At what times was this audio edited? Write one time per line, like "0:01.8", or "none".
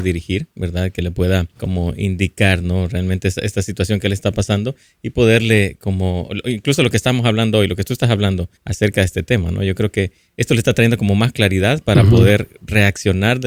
0:01.5
0:08.6